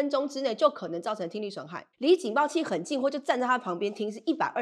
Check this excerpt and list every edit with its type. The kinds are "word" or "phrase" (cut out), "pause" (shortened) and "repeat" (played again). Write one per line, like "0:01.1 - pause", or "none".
0:01.9 - pause